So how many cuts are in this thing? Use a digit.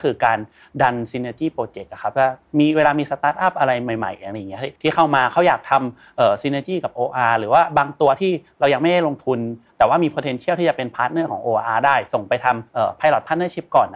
2